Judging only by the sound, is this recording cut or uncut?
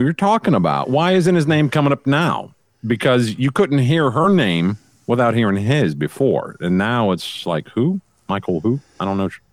uncut